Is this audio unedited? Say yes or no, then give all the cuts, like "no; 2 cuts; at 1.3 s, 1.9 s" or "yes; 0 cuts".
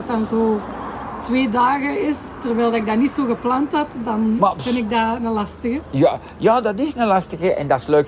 yes; 0 cuts